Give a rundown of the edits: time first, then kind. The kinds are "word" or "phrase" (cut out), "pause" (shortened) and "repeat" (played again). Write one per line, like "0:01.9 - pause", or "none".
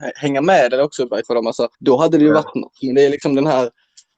0:01.2 - word
0:01.7 - pause